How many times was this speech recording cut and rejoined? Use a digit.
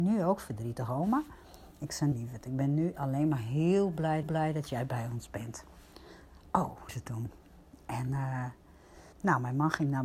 4